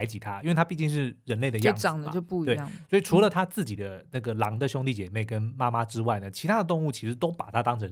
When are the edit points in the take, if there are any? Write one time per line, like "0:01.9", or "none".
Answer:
none